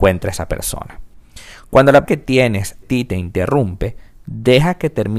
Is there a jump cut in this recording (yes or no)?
yes